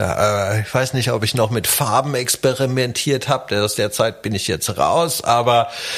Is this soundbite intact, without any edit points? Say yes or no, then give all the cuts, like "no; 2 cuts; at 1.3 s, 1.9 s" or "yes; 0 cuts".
yes; 0 cuts